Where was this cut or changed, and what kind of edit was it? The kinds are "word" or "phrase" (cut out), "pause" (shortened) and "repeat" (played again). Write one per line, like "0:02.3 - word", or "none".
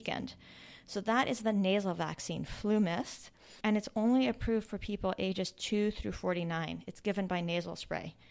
0:03.6 - pause